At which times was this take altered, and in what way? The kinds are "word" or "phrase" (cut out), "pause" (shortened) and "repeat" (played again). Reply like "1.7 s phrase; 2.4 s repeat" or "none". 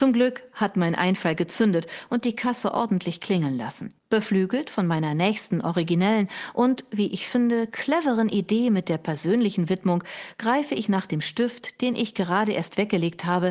4.0 s pause